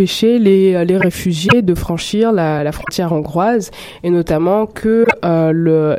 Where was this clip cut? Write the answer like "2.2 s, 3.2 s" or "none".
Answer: none